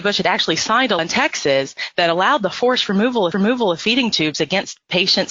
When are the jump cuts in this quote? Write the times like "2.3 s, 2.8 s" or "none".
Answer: 1.0 s, 3.3 s